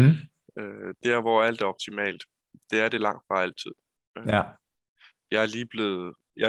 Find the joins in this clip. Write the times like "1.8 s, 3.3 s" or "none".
none